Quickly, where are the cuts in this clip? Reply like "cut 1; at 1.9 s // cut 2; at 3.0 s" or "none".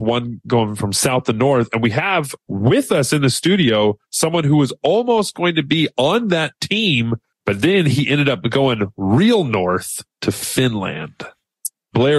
cut 1; at 7.3 s // cut 2; at 10.1 s

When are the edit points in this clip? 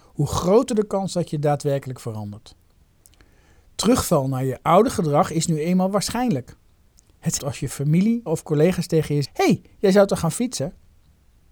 cut 1; at 7.4 s // cut 2; at 8.3 s // cut 3; at 9.2 s

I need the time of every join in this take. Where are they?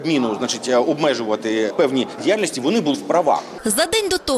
cut 1; at 1.7 s // cut 2; at 2.2 s // cut 3; at 2.9 s

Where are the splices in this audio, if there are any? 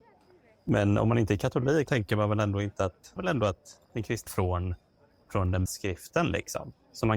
cut 1; at 1.9 s // cut 2; at 3.2 s // cut 3; at 3.8 s // cut 4; at 4.3 s // cut 5; at 5.7 s

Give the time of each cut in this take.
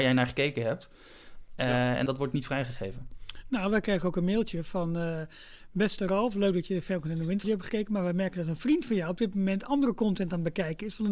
cut 1; at 2.1 s // cut 2; at 7.4 s

